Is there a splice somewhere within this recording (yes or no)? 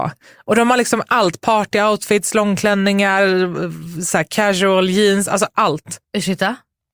no